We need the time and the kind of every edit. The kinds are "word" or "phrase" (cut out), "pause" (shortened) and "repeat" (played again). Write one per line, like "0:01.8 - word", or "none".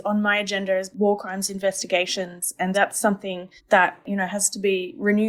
0:00.9 - phrase
0:02.7 - word
0:03.6 - pause